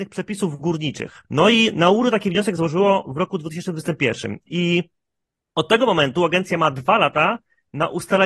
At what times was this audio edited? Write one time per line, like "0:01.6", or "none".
none